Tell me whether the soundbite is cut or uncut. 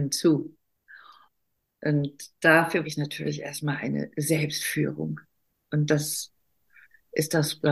cut